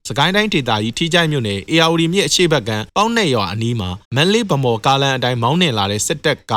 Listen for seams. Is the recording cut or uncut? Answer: cut